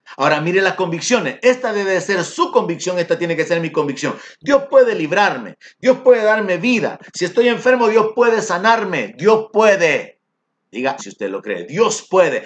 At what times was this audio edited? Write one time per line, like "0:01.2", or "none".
0:11.0